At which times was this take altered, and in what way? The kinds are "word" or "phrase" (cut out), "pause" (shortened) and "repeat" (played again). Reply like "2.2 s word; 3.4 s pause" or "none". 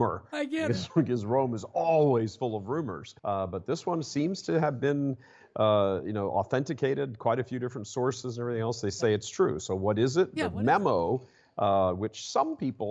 3.2 s pause